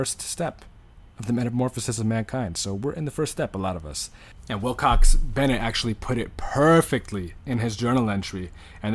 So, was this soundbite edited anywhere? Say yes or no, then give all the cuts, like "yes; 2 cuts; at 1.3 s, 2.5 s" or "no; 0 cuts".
yes; 1 cut; at 1.0 s